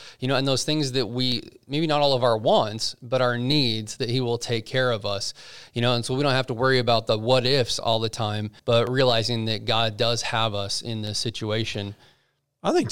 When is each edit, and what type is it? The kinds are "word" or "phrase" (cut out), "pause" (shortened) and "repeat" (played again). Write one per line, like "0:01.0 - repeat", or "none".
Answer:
0:08.6 - pause